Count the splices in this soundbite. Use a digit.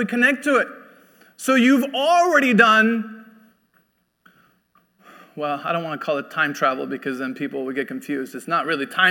0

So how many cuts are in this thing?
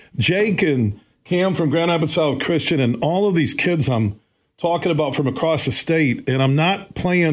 0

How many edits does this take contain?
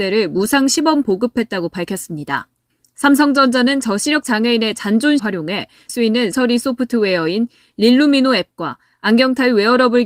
4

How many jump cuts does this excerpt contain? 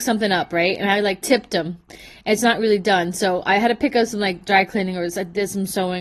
0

